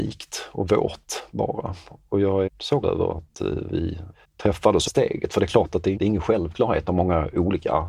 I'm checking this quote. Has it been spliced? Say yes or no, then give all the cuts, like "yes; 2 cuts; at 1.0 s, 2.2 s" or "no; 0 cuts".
yes; 5 cuts; at 2.5 s, 2.8 s, 4.2 s, 4.9 s, 6.0 s